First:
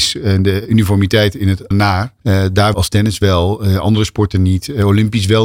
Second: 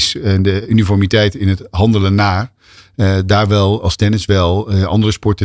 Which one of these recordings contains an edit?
first; 3 cuts; at 1.7 s, 2.2 s, 2.7 s

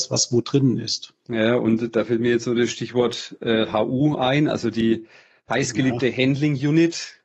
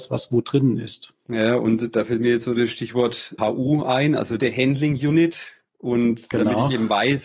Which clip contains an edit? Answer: second; 2 cuts; at 3.4 s, 4.4 s

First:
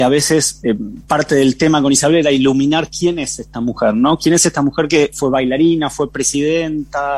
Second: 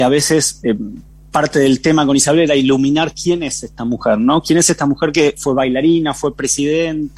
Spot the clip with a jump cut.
first; 1 cut; at 1.0 s

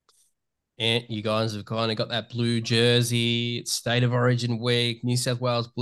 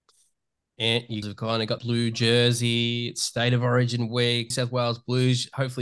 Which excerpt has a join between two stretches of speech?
second; 3 cuts; at 1.2 s, 1.8 s, 4.5 s

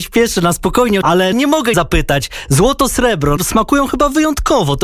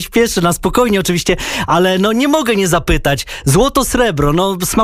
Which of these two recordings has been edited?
first; 4 cuts; at 1.0 s, 1.3 s, 1.7 s, 3.4 s

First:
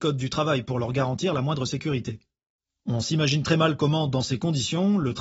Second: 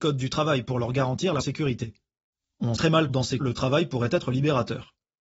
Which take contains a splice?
second; 4 cuts; at 1.4 s, 2.8 s, 3.1 s, 3.4 s

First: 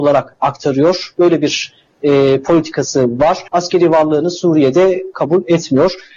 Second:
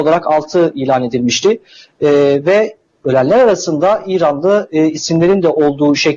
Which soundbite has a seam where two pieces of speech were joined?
first; 1 cut; at 3.5 s

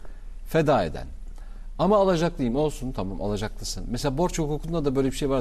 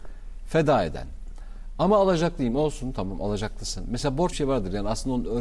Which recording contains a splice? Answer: second; 1 cut; at 4.3 s

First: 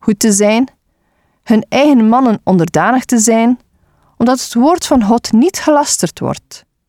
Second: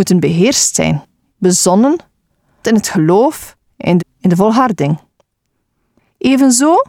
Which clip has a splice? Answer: second; 3 cuts; at 1.3 s, 2.6 s, 4.0 s

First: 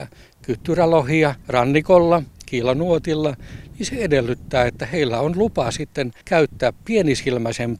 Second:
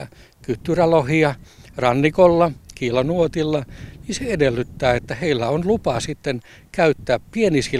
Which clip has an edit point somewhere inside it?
first; 2 cuts; at 1.4 s, 6.2 s

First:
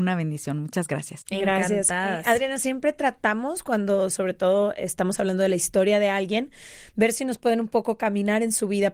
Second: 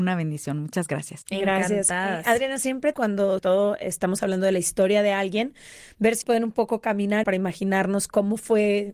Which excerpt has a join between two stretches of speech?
second; 4 cuts; at 2.9 s, 3.4 s, 6.2 s, 7.2 s

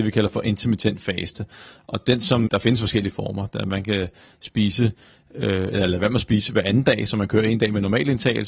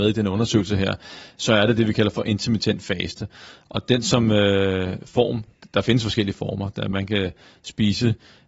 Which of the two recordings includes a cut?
first; 1 cut; at 2.5 s

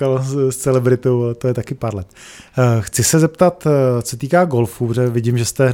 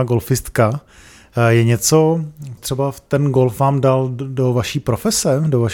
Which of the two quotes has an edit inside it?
second; 1 cut; at 2.6 s

